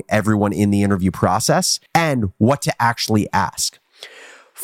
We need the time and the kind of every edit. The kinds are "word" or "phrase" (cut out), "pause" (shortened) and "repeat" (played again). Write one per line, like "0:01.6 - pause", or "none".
0:01.9 - pause